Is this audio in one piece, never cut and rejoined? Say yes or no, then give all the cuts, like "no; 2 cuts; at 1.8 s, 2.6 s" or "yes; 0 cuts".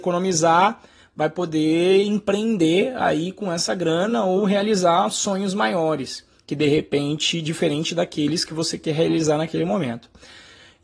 yes; 0 cuts